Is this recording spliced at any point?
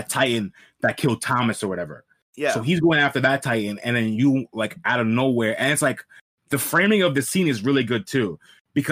no; 0 cuts

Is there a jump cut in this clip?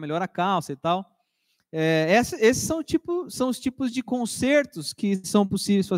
no; 0 cuts

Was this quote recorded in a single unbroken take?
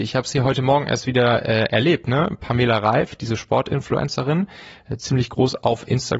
yes; 0 cuts

